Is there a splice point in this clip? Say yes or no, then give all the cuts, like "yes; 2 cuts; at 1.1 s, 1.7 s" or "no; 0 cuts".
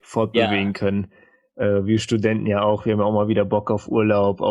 no; 0 cuts